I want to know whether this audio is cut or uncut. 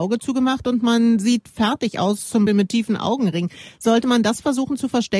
cut